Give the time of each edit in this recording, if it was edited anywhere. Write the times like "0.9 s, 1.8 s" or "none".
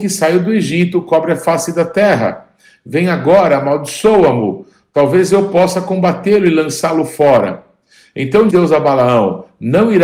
8.5 s